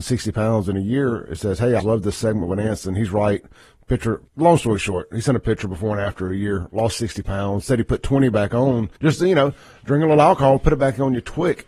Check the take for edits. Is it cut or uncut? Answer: cut